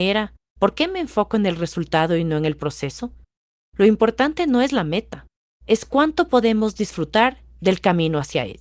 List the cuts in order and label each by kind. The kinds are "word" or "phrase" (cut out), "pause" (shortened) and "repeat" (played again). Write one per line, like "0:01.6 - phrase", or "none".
none